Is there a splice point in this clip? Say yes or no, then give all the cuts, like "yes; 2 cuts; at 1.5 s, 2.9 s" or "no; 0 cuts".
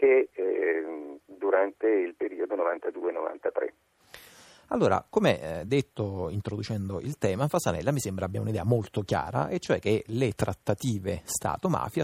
no; 0 cuts